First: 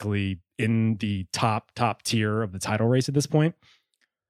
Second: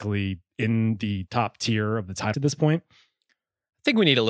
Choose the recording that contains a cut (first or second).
second